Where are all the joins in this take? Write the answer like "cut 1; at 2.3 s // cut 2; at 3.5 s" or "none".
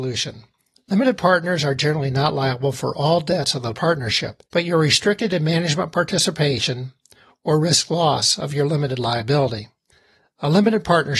cut 1; at 4.5 s